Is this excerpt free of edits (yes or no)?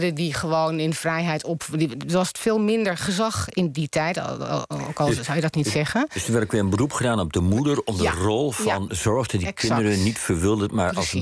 yes